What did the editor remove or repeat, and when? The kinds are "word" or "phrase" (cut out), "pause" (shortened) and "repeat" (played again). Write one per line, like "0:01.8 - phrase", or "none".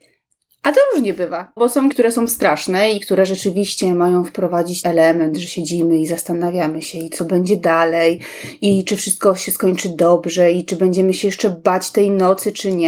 0:01.6 - word
0:01.9 - word
0:04.8 - word